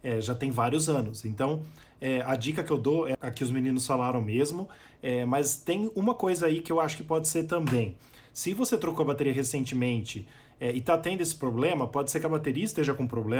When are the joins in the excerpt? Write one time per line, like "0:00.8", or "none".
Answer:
0:03.1